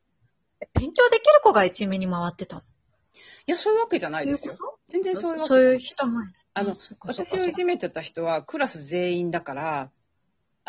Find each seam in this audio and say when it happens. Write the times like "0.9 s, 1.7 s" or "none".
4.8 s